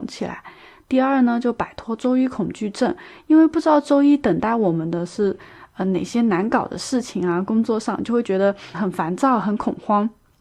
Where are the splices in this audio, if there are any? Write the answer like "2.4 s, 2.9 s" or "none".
8.7 s